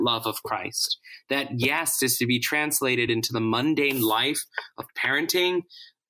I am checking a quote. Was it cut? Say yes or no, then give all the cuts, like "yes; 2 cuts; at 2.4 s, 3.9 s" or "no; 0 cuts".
no; 0 cuts